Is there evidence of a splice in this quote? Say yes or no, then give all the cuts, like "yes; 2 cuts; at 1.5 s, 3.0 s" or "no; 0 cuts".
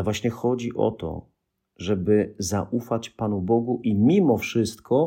no; 0 cuts